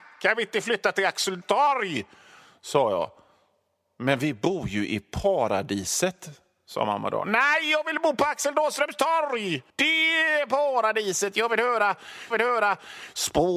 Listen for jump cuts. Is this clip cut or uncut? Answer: cut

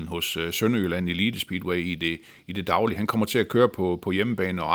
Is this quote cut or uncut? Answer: uncut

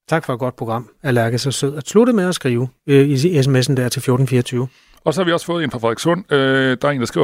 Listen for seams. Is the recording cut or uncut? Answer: uncut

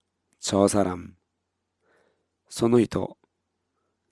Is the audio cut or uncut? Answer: uncut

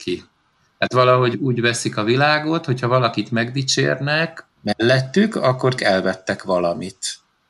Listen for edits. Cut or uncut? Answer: cut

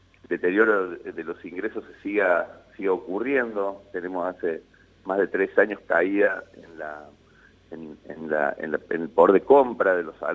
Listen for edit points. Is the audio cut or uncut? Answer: uncut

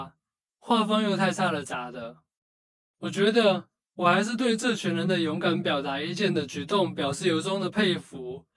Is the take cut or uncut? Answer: uncut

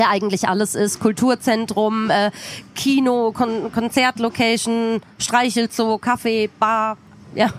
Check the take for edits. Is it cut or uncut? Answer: uncut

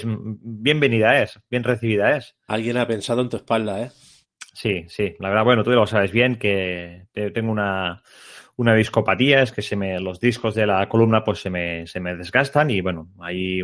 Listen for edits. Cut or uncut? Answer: uncut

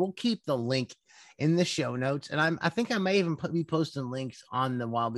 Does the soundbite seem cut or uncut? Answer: uncut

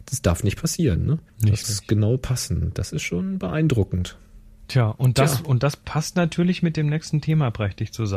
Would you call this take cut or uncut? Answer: cut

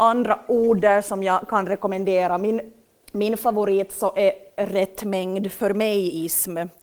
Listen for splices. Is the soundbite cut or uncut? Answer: cut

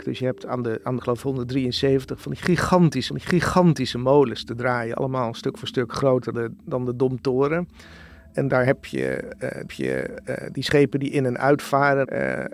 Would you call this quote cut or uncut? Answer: cut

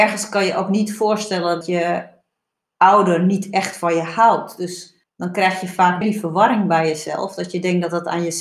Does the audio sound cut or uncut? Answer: cut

